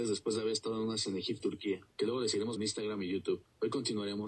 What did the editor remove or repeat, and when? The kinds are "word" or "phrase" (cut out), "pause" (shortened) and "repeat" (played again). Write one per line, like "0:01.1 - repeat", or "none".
0:01.1 - word
0:01.4 - word
0:02.6 - word